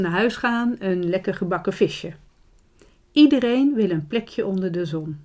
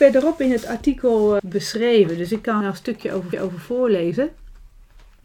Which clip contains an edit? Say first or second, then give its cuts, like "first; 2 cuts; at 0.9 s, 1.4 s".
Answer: second; 3 cuts; at 1.4 s, 2.6 s, 3.3 s